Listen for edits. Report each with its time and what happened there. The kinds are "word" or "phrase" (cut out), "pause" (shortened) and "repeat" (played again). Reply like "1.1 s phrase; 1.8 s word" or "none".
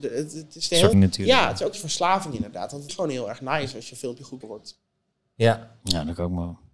0.9 s word; 1.7 s word; 2.9 s word; 4.4 s word